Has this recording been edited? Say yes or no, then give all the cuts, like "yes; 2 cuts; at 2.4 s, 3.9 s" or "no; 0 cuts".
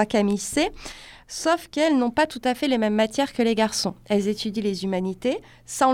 no; 0 cuts